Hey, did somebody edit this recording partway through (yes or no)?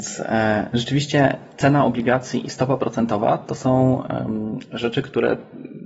no